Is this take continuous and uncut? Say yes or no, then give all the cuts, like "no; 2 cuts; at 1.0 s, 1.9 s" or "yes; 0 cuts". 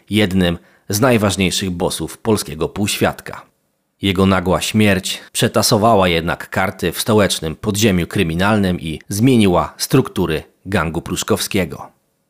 no; 2 cuts; at 5.3 s, 9.0 s